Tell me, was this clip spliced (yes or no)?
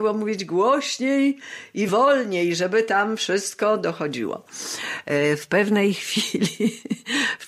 no